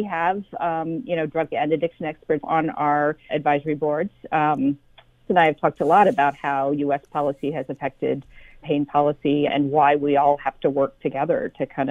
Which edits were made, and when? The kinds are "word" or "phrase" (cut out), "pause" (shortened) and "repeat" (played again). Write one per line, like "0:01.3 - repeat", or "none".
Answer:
0:01.5 - word
0:02.4 - word
0:03.3 - word
0:05.3 - word
0:08.6 - word
0:09.5 - word